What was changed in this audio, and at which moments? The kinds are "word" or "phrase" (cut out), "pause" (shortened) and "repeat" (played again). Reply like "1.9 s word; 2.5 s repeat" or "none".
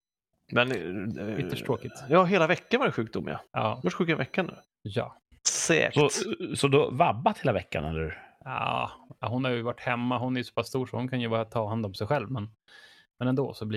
3.5 s pause; 4.7 s pause